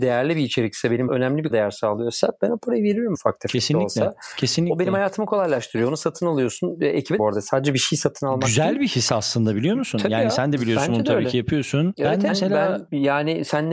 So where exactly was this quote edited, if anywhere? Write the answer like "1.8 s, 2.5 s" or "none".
1.1 s, 1.5 s, 3.1 s, 7.2 s, 12.3 s